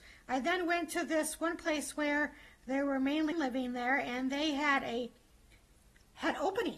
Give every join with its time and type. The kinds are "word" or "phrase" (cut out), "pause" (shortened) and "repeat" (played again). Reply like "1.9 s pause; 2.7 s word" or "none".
3.3 s word